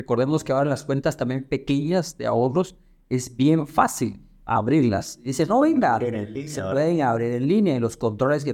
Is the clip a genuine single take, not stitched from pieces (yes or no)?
yes